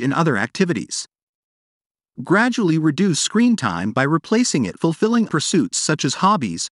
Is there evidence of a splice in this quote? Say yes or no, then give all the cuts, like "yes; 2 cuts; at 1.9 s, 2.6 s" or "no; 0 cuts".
yes; 2 cuts; at 4.8 s, 5.3 s